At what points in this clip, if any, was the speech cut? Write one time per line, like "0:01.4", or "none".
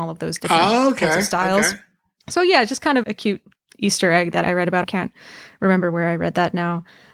0:03.0
0:04.4
0:04.8

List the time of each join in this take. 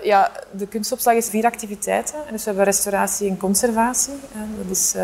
0:01.3

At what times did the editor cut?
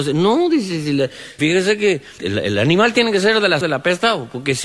0:01.4
0:02.2
0:03.6

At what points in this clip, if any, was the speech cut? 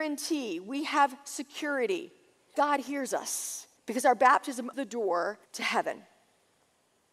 0:02.5
0:03.8
0:04.7
0:05.5

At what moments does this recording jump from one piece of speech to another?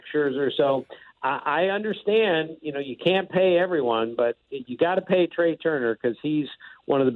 none

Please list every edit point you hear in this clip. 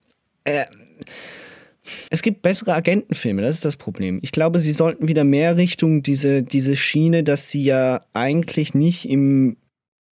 0:02.1

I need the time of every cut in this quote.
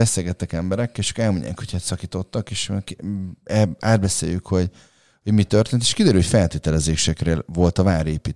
none

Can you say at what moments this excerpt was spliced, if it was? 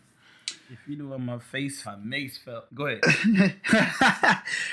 0:01.8
0:02.7

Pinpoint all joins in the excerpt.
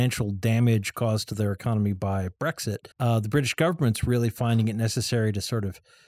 0:02.9

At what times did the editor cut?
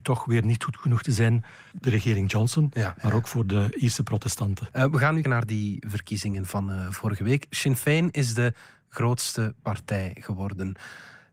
0:01.7
0:05.2

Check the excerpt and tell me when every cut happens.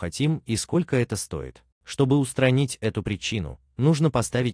0:01.7

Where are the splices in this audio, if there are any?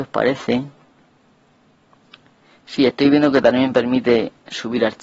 none

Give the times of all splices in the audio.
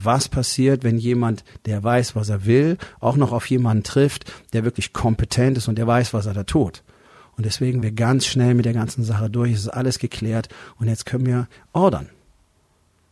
0:07.8

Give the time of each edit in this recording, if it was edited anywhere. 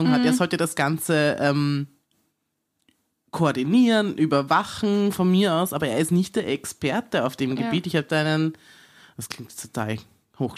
none

